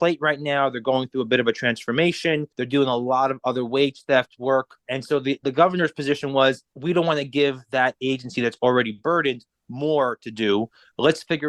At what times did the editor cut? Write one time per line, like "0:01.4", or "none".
0:02.5
0:04.8
0:06.7